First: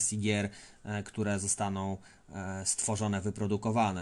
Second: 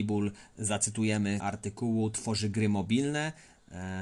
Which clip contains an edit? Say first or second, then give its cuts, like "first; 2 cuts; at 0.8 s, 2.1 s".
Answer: second; 1 cut; at 1.4 s